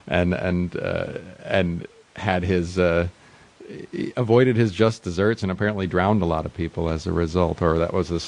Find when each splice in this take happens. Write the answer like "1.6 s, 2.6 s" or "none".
none